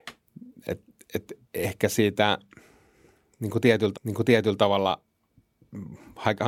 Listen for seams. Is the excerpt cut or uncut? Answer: cut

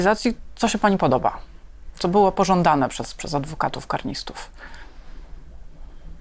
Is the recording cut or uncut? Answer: uncut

